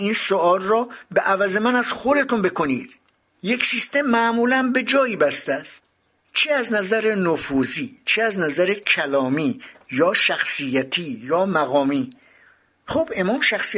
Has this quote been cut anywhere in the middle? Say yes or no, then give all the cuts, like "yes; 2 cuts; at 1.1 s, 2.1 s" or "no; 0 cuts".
no; 0 cuts